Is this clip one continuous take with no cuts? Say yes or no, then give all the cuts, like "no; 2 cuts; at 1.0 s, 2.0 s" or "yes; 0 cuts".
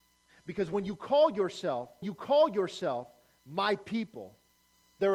no; 1 cut; at 2.0 s